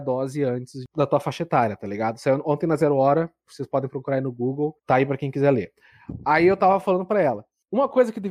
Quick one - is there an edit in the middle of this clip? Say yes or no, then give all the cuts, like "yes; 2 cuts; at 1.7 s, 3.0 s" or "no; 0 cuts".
yes; 1 cut; at 4.8 s